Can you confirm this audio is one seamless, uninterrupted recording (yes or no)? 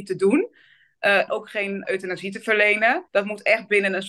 no